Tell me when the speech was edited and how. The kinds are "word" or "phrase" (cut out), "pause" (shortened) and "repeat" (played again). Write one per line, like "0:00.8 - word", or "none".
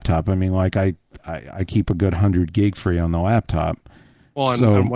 none